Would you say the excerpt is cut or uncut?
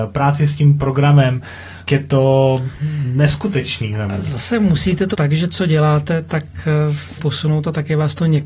cut